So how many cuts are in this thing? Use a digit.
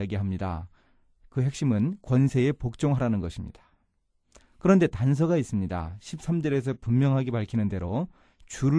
0